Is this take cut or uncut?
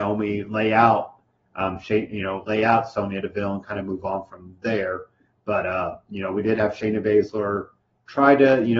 uncut